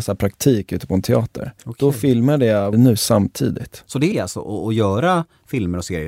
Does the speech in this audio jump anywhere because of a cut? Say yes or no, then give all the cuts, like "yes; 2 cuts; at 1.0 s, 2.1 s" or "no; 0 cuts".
yes; 3 cuts; at 1.6 s, 2.7 s, 4.1 s